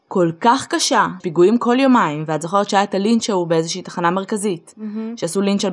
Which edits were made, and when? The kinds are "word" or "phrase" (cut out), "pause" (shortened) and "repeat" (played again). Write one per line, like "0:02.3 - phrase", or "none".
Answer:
0:01.2 - phrase